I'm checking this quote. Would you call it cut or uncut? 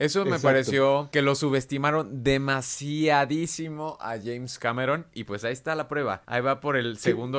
uncut